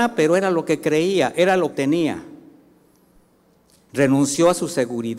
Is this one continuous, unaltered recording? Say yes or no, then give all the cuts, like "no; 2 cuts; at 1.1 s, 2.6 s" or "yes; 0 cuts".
no; 1 cut; at 1.7 s